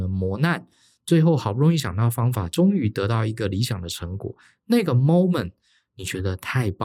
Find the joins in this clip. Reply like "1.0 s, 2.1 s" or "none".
none